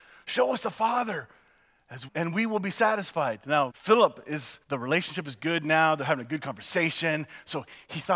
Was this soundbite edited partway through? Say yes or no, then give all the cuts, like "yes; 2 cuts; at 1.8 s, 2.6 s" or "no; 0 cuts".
yes; 3 cuts; at 2.1 s, 3.7 s, 4.6 s